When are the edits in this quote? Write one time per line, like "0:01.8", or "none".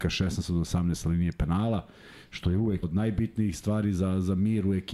0:02.8